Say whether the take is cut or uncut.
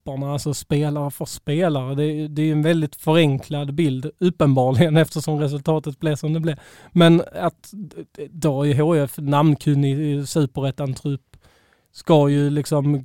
uncut